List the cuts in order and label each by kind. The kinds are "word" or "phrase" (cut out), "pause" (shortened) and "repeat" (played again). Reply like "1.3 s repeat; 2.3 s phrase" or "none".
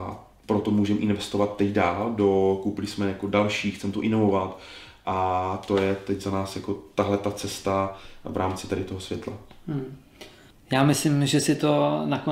none